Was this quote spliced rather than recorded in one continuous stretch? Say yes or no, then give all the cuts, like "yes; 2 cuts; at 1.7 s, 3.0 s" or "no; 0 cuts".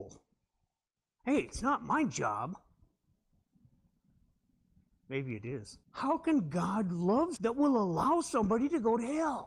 yes; 2 cuts; at 5.8 s, 7.4 s